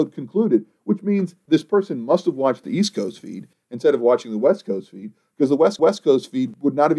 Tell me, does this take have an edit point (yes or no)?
yes